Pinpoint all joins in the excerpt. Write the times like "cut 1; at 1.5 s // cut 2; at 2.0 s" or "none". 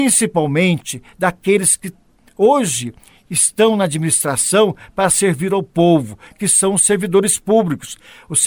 none